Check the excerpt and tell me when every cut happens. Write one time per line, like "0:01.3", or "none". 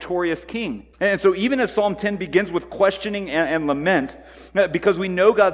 0:00.9